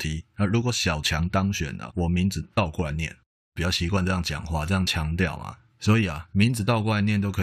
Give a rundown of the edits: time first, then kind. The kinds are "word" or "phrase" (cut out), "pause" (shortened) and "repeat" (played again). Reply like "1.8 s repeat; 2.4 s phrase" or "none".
1.9 s word